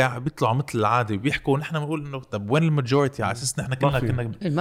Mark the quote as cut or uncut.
uncut